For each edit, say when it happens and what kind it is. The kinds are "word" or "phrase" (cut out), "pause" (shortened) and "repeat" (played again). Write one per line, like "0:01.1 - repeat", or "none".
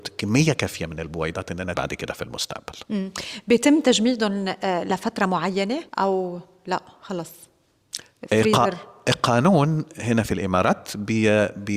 0:01.7 - word
0:05.9 - pause